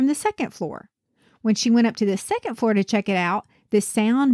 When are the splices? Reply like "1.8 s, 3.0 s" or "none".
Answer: none